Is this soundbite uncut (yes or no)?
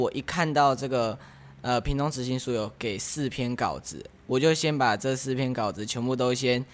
yes